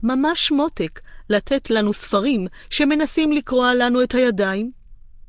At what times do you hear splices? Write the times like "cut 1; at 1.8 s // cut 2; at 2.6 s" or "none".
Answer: none